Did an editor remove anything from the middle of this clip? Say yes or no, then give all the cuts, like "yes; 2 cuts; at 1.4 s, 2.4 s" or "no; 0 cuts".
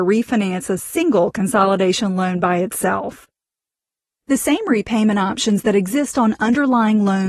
no; 0 cuts